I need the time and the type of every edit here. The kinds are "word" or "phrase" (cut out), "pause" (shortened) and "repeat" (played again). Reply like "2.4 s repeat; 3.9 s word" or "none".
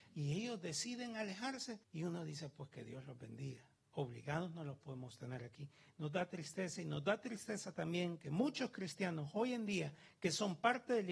1.8 s pause